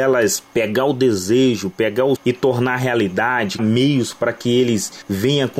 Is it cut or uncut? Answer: cut